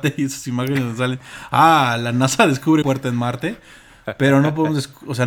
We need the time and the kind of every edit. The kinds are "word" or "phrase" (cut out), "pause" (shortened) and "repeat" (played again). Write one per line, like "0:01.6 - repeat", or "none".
0:02.8 - word